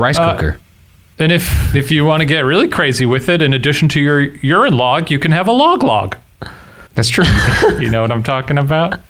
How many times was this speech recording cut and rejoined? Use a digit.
1